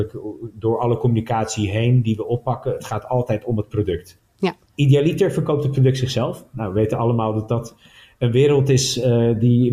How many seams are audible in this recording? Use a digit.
0